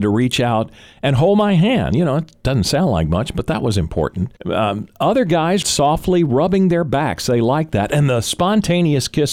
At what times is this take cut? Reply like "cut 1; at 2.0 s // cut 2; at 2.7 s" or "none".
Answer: cut 1; at 4.4 s // cut 2; at 5.6 s

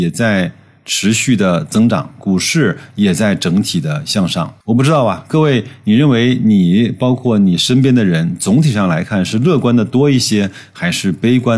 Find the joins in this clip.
cut 1; at 4.6 s

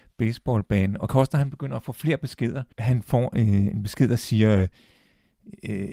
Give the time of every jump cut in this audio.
cut 1; at 1.1 s // cut 2; at 2.7 s

